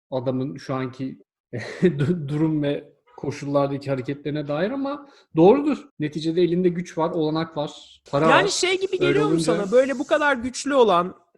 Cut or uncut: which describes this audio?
cut